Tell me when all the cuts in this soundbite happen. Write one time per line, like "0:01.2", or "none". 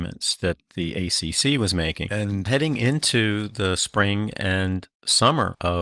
none